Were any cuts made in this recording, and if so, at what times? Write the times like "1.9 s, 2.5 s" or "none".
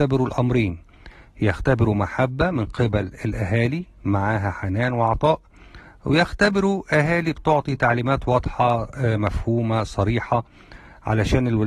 none